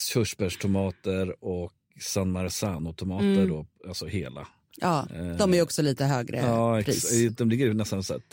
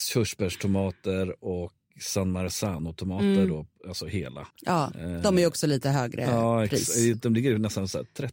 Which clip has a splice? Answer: second; 1 cut; at 4.5 s

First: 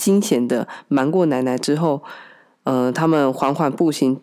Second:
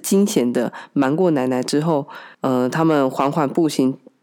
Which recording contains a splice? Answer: second; 1 cut; at 2.3 s

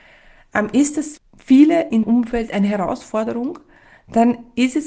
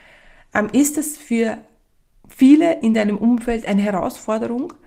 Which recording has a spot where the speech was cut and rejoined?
first; 2 cuts; at 1.2 s, 2.0 s

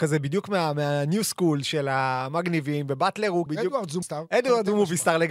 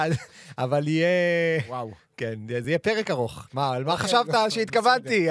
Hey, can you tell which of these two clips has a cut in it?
first; 2 cuts; at 3.5 s, 4.0 s

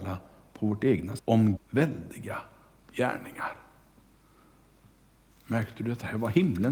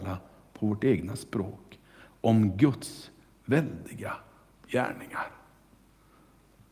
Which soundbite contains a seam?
first; 2 cuts; at 1.2 s, 1.6 s

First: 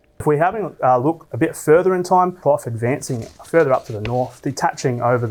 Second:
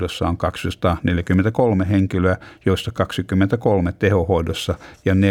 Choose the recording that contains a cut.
first; 1 cut; at 2.4 s

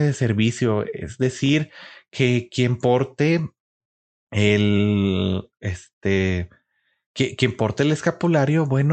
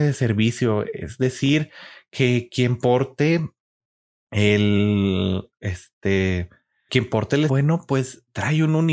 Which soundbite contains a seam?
second; 2 cuts; at 6.9 s, 7.5 s

